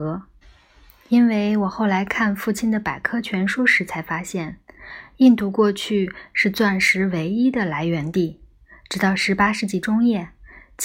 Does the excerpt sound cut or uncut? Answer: uncut